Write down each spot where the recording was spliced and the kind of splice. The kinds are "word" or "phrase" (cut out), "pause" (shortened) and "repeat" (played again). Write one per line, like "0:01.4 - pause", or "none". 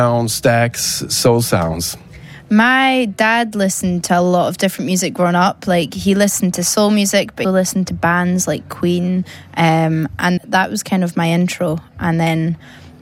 0:07.4 - word
0:10.4 - word

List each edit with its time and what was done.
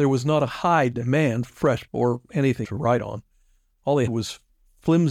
0:01.5 - word
0:01.9 - word
0:02.6 - word
0:04.1 - word

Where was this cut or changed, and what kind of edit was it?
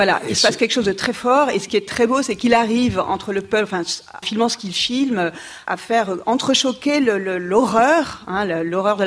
0:04.2 - word

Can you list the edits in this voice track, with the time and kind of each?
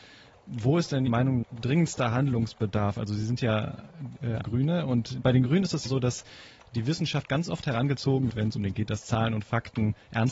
0:01.1 - word
0:01.4 - word
0:04.4 - word
0:05.8 - word
0:08.3 - word
0:08.7 - word

